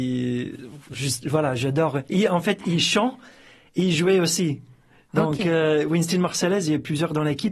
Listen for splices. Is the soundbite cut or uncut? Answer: uncut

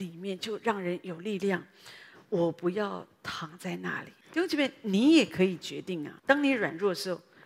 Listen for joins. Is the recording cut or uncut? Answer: cut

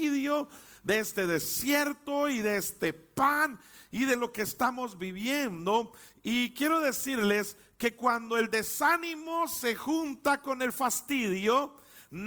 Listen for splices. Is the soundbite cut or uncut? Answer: uncut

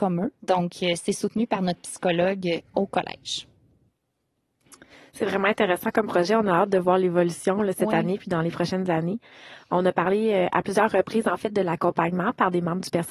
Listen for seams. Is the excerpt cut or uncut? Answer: uncut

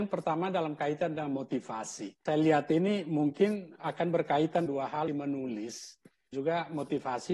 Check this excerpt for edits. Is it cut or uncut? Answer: cut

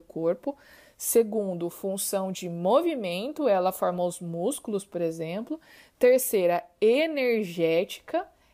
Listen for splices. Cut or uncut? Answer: uncut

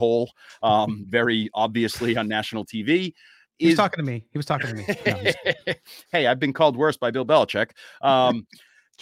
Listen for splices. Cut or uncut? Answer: uncut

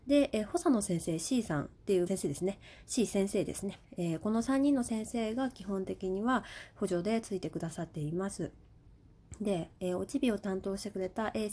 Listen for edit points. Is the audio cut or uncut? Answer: cut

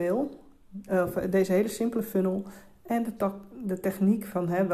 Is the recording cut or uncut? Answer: uncut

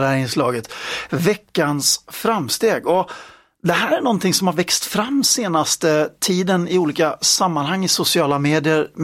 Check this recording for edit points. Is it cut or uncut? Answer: uncut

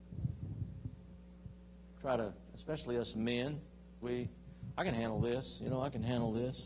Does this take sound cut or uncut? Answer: cut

